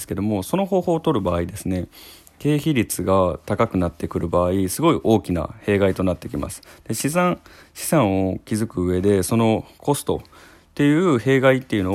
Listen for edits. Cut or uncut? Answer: uncut